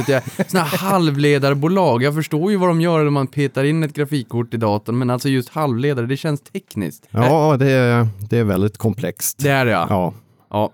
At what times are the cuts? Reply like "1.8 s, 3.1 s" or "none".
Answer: 7.1 s